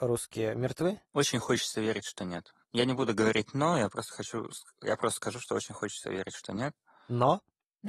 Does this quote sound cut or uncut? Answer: cut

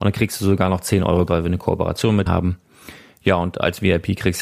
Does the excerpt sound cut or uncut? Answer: cut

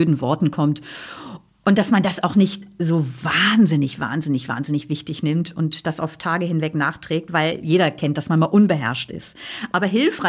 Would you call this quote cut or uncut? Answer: uncut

